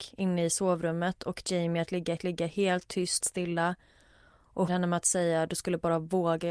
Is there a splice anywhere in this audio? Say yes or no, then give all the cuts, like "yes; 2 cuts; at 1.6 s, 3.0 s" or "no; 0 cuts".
yes; 4 cuts; at 1.4 s, 2.2 s, 3.2 s, 4.7 s